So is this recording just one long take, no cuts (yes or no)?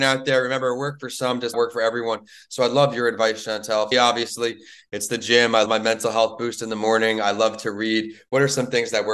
no